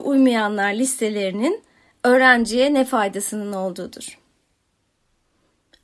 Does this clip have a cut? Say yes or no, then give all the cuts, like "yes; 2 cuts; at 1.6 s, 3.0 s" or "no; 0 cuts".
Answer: no; 0 cuts